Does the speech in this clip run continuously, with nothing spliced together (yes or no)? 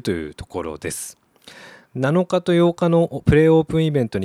no